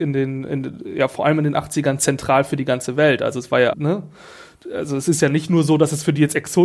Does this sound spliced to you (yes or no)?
yes